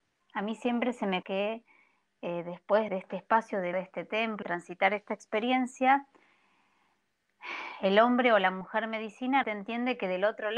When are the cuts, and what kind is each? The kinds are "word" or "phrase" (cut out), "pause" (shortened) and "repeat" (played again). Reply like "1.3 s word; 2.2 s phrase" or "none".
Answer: 1.2 s word; 2.9 s word; 3.7 s word; 4.4 s word; 9.4 s word

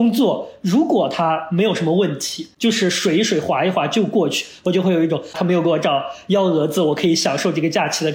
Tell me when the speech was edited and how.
5.3 s phrase

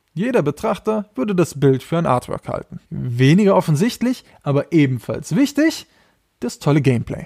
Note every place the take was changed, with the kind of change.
2.9 s pause

